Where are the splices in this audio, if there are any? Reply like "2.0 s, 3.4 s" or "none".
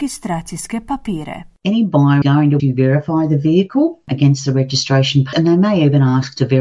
2.2 s, 2.6 s, 5.3 s

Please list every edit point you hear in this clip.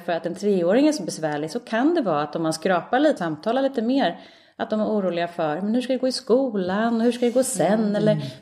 3.2 s

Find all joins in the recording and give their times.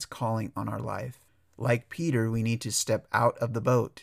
1.3 s

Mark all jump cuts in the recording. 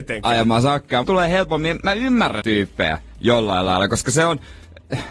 1.0 s, 2.4 s

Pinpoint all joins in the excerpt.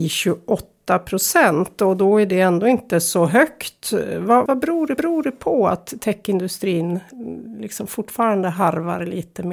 4.5 s, 5.0 s

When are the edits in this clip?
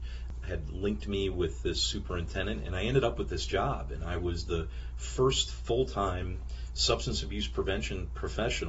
none

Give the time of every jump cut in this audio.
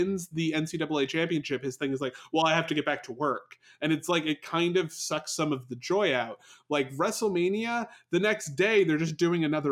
none

